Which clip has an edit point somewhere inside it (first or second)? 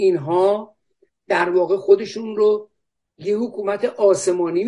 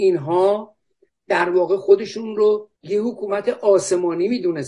second